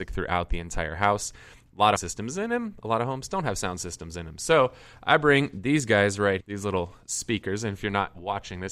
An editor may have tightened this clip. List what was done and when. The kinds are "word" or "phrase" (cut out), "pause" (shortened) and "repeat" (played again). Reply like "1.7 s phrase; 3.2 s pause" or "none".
2.0 s phrase; 6.4 s word